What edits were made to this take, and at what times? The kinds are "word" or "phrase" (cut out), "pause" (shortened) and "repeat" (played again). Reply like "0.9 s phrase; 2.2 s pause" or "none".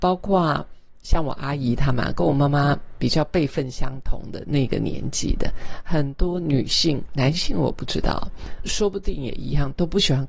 8.6 s word